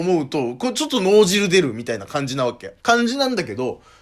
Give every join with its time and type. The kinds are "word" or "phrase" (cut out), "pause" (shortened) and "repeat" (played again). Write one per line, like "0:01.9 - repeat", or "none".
0:02.8 - pause